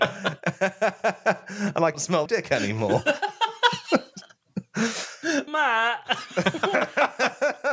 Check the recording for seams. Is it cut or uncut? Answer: cut